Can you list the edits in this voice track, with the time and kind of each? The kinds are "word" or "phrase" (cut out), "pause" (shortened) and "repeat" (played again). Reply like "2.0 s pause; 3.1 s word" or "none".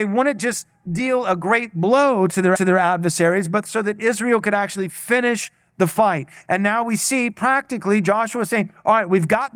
2.6 s repeat